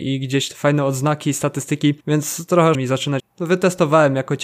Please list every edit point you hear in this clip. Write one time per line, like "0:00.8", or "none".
0:02.0
0:02.7
0:03.2